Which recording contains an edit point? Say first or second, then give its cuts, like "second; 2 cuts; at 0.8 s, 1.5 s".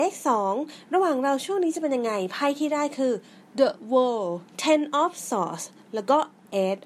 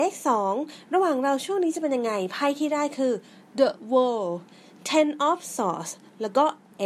first; 1 cut; at 4.5 s